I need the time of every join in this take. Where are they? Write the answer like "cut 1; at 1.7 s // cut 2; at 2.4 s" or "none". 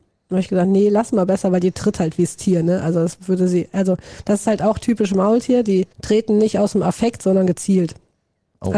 cut 1; at 5.9 s